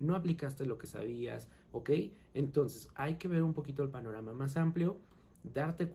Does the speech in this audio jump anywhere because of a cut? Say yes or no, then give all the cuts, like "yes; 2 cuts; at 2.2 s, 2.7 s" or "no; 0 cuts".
no; 0 cuts